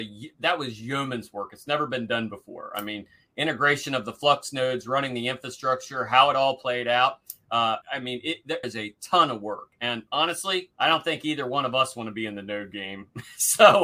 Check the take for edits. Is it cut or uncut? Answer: cut